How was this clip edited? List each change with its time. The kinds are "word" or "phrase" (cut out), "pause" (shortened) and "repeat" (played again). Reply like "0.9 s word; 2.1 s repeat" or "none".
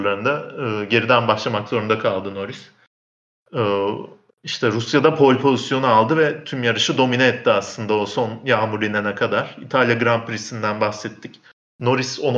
none